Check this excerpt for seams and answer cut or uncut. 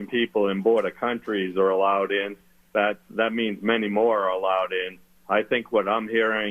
uncut